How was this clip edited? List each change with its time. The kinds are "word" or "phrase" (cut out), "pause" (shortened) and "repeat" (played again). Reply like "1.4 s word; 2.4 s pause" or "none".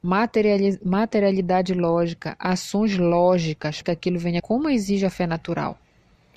3.8 s word; 4.4 s word

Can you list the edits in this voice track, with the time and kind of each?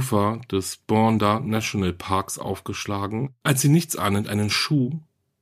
none

